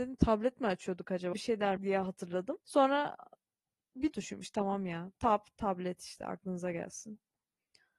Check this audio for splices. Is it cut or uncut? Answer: cut